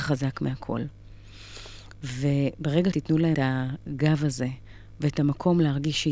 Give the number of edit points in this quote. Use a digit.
2